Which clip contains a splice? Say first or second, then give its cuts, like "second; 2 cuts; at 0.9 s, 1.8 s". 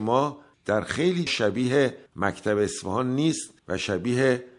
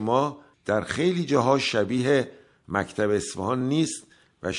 first; 3 cuts; at 1.3 s, 2.1 s, 3.6 s